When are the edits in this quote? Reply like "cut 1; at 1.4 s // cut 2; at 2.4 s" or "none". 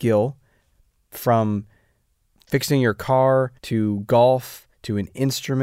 cut 1; at 3.6 s // cut 2; at 4.7 s